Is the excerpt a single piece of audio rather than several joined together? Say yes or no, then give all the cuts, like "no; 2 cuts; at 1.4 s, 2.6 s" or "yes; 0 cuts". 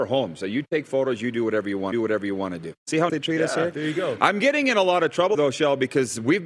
no; 4 cuts; at 1.9 s, 2.8 s, 3.1 s, 5.3 s